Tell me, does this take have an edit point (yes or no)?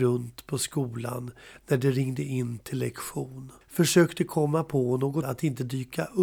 yes